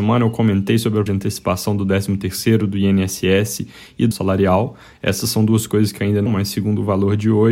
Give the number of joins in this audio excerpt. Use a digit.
3